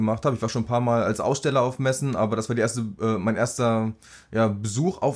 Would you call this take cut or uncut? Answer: uncut